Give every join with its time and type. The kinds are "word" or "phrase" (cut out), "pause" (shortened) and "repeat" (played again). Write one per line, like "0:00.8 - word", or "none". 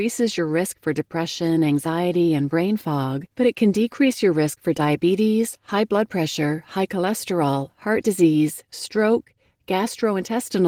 0:03.3 - pause